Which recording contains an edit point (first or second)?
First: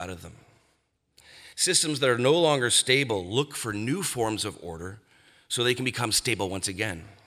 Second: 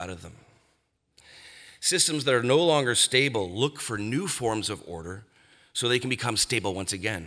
first